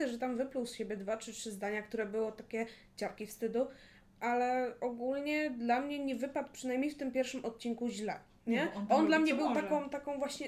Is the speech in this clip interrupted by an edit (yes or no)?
no